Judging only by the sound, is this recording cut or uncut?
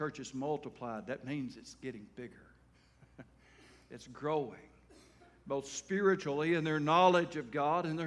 uncut